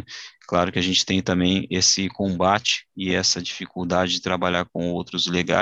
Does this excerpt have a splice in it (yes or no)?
no